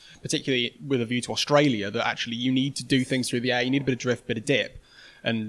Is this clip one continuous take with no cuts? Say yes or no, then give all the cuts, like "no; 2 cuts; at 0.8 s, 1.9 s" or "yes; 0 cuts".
yes; 0 cuts